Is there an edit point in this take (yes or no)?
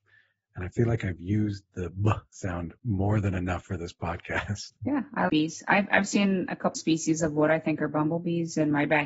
yes